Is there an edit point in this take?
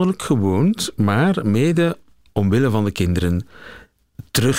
no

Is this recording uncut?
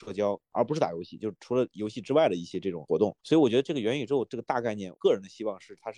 no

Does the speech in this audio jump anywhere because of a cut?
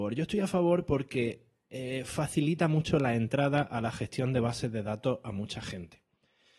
no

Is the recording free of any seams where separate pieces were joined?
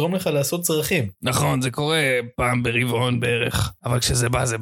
yes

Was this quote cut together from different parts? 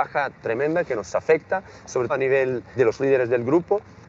yes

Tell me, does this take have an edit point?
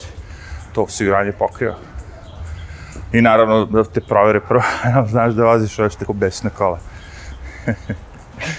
yes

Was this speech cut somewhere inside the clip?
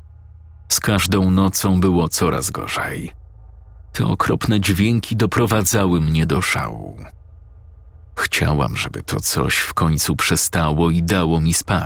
no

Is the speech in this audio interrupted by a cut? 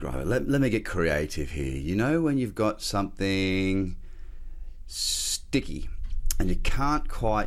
no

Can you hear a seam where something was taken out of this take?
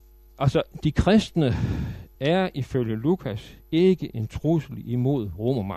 no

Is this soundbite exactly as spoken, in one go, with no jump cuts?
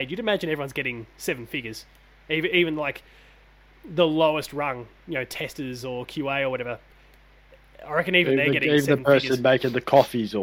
yes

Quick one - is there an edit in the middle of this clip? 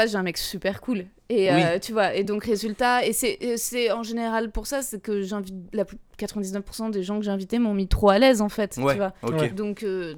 no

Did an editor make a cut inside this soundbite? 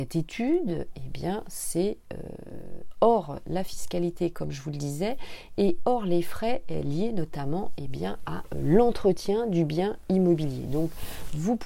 no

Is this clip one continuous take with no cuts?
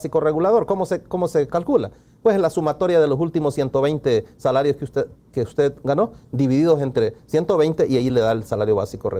yes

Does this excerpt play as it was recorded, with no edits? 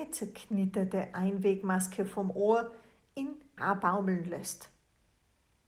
no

